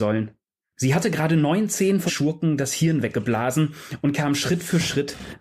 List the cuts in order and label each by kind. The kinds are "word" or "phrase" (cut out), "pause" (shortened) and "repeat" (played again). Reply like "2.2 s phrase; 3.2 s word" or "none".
2.1 s word